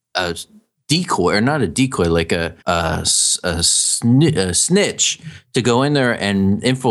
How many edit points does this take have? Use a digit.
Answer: 1